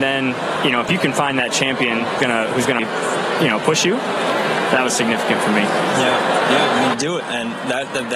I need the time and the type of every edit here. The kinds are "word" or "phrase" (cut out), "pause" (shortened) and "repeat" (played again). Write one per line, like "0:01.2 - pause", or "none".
0:02.2 - word
0:02.8 - word
0:07.2 - word